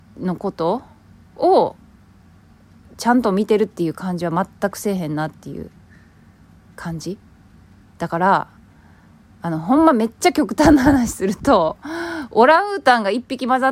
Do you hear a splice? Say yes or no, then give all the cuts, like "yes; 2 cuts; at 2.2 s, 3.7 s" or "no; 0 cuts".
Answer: no; 0 cuts